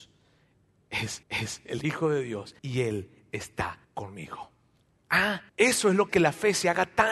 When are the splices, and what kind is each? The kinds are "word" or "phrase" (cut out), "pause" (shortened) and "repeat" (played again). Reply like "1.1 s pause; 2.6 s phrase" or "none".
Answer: 1.2 s repeat; 2.6 s pause; 3.8 s pause; 5.5 s pause; 6.1 s phrase